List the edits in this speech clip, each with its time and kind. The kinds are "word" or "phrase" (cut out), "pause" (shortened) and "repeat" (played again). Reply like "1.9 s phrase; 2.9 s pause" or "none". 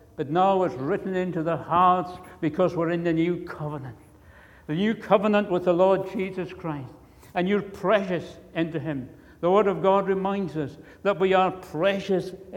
none